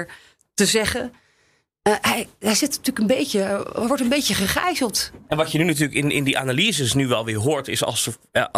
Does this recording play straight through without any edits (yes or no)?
yes